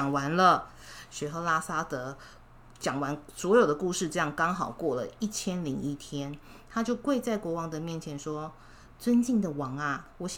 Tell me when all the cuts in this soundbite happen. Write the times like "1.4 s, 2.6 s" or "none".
none